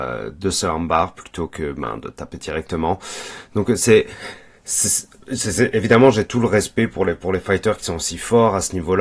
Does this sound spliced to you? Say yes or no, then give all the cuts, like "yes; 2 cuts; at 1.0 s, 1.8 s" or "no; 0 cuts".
no; 0 cuts